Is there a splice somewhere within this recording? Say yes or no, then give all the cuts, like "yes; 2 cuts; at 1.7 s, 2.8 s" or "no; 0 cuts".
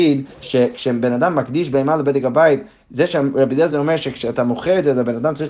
no; 0 cuts